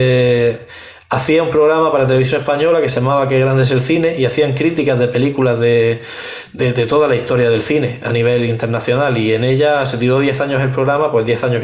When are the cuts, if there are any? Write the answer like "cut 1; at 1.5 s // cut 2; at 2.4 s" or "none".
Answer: none